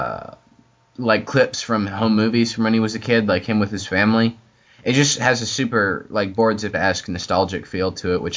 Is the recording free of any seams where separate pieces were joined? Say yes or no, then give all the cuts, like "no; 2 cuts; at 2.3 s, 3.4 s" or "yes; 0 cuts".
no; 1 cut; at 6.7 s